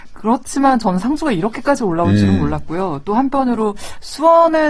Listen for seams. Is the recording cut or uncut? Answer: uncut